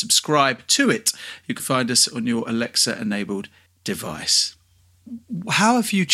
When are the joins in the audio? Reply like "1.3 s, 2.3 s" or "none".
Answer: 1.6 s, 3.7 s